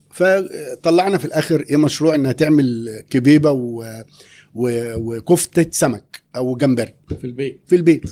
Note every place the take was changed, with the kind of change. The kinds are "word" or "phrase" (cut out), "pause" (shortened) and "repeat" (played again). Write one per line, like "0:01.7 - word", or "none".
none